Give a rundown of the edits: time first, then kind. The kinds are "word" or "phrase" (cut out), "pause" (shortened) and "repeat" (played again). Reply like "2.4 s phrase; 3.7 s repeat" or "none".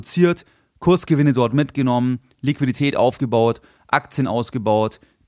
none

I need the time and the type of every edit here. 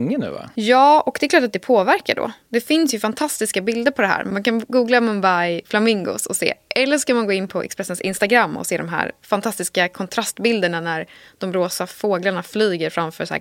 none

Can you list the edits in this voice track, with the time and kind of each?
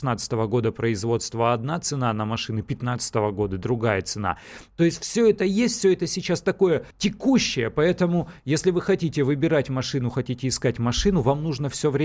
6.9 s pause

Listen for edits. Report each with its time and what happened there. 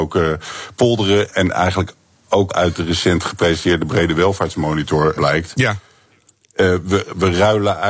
1.3 s word; 2.5 s word; 5.2 s word

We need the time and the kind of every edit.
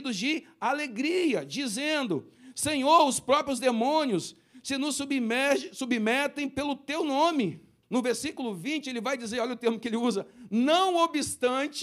7.8 s pause

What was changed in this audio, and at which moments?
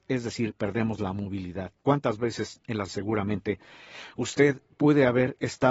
1.8 s pause; 2.9 s word; 4.7 s pause

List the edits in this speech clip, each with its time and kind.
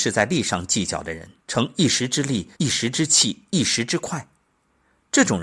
1.4 s pause; 2.5 s pause

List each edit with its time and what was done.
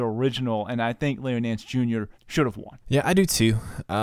2.1 s pause; 2.8 s pause

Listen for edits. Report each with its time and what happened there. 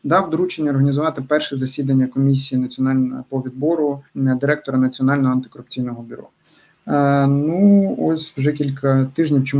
4.1 s pause

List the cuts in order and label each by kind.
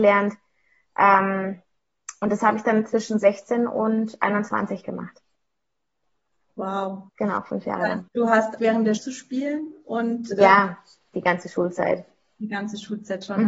7.1 s pause; 8.1 s pause; 8.6 s word; 9.0 s phrase; 11.1 s word

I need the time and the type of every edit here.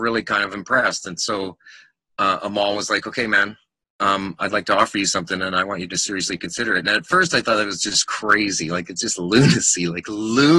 none

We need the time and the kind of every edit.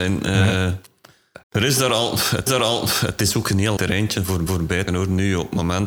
1.4 s pause; 2.5 s repeat; 3.8 s word; 4.5 s repeat; 4.9 s word

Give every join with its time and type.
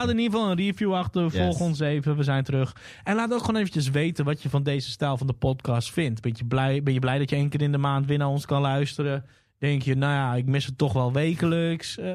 none

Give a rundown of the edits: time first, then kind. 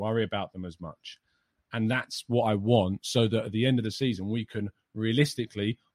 none

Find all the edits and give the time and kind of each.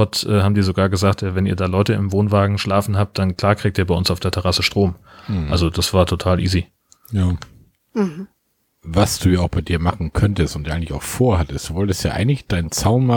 none

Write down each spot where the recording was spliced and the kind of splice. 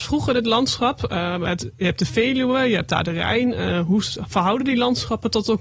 none

